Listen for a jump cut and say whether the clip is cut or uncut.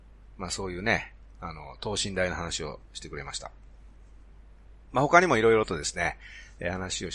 cut